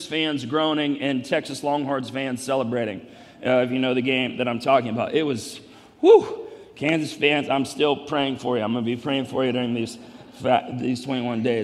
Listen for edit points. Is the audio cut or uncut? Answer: uncut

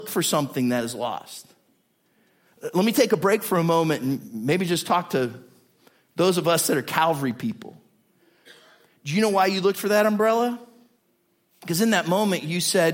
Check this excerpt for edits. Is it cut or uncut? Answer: uncut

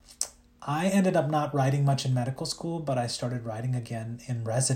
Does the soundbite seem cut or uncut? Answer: uncut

